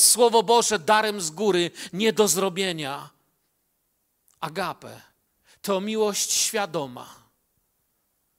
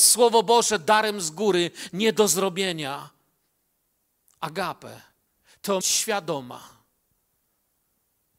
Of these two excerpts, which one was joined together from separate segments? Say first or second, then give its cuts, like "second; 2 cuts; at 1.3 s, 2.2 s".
second; 1 cut; at 5.8 s